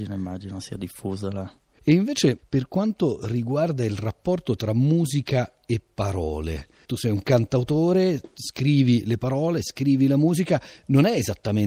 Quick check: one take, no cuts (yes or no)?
yes